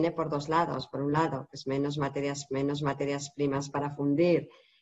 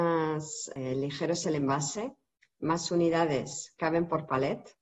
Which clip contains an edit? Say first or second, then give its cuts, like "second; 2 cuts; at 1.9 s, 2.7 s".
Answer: first; 1 cut; at 2.5 s